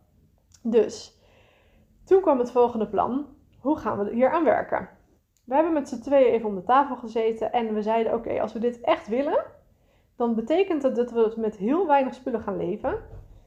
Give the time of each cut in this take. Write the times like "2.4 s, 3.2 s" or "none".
none